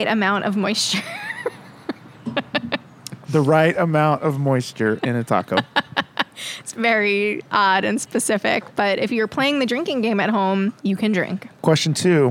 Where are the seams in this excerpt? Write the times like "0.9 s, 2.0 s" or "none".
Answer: 10.8 s